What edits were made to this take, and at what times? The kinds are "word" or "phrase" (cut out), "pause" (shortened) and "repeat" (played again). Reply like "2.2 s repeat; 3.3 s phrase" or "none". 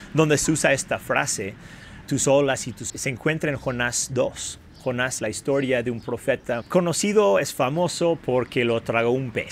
2.0 s word; 2.9 s word; 5.2 s word; 6.6 s word